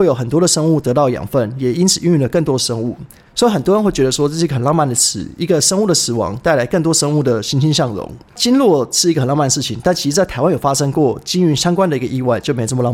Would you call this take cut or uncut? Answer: uncut